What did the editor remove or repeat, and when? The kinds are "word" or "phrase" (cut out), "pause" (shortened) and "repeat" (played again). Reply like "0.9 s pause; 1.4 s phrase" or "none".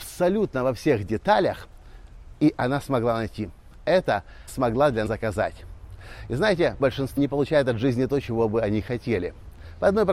2.6 s word; 4.5 s word; 5.1 s word; 6.8 s word; 7.2 s word